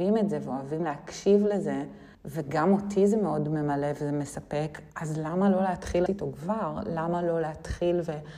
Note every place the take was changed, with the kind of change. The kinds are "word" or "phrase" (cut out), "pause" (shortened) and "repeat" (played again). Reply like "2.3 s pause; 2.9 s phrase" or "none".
2.1 s pause; 4.9 s pause; 6.1 s word